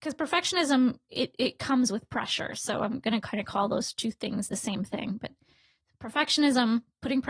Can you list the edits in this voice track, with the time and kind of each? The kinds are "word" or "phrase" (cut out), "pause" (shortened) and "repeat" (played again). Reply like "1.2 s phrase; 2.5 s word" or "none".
none